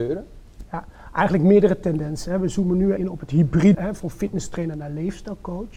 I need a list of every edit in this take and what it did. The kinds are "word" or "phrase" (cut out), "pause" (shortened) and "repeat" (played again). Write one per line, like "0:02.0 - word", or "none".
0:03.0 - word
0:03.7 - phrase